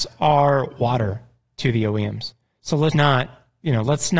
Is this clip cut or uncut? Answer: cut